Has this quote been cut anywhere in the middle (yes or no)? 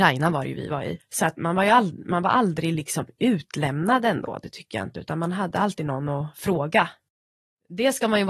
no